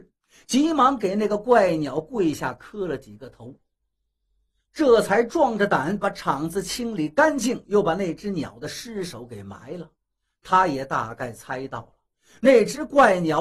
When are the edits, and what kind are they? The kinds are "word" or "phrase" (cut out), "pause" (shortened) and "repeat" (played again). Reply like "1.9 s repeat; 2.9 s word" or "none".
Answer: none